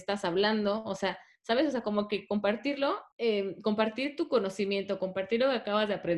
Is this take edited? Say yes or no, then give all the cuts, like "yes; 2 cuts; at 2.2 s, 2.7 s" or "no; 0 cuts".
yes; 1 cut; at 3.1 s